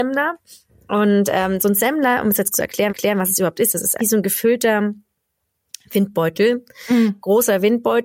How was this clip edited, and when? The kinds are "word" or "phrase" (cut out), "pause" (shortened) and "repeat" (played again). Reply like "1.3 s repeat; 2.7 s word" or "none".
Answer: 2.5 s word; 2.9 s repeat; 4.0 s word